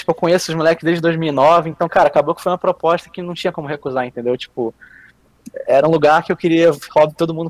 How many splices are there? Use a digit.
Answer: 0